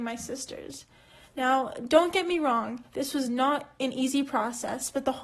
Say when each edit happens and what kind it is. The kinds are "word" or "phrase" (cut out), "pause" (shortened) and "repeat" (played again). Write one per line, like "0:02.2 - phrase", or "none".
none